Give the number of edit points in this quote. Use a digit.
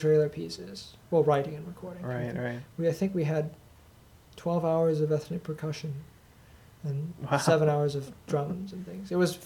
0